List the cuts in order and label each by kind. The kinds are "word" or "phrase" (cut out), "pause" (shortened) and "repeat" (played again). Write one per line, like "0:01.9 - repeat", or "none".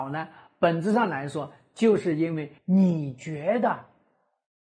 0:02.6 - pause

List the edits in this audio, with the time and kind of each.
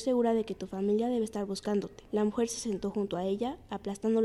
0:02.1 - pause

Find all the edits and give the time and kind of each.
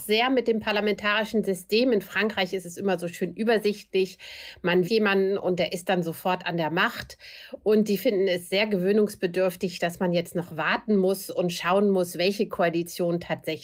0:04.8 - word
0:08.0 - word

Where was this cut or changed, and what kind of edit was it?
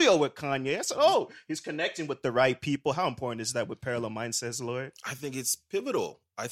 none

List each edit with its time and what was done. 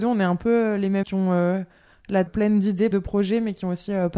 0:01.0 - word
0:02.3 - word
0:02.9 - word

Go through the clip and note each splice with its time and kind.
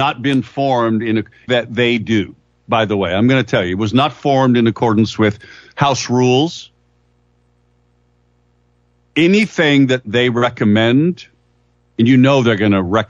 0:01.5 - word

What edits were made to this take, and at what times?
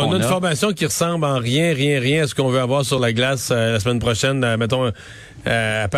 none

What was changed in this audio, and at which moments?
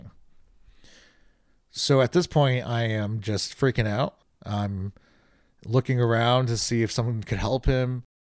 0:04.2 - pause

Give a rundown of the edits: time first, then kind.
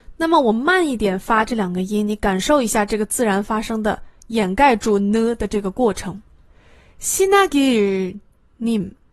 none

